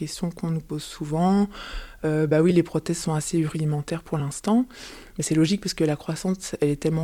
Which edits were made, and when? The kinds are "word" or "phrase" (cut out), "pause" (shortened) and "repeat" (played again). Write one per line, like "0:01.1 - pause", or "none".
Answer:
none